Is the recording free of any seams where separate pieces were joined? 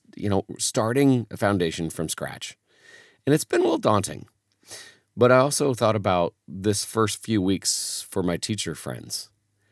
yes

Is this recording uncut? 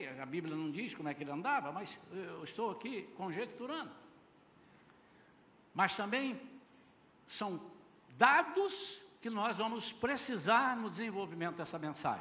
yes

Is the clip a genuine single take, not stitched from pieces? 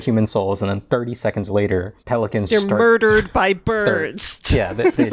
no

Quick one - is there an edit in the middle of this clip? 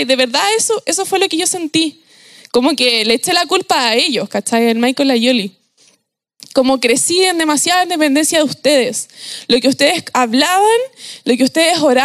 no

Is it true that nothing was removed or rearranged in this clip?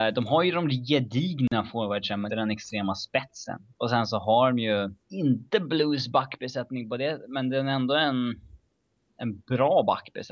no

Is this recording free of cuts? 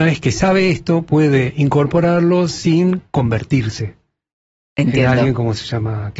yes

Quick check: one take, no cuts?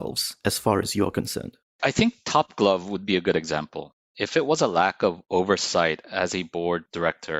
yes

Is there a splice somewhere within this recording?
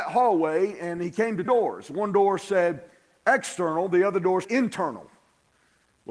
yes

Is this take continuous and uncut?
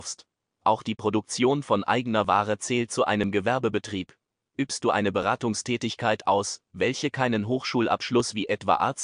yes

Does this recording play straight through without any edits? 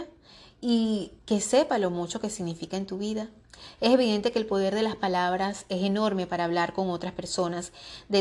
no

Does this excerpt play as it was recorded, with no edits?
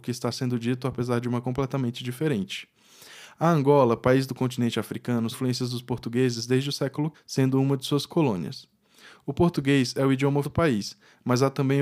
no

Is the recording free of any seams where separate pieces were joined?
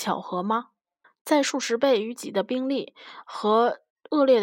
no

